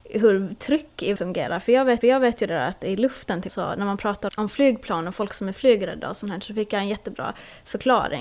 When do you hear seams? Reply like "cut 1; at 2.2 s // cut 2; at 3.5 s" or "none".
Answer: cut 1; at 1.2 s // cut 2; at 2.0 s // cut 3; at 3.5 s // cut 4; at 4.3 s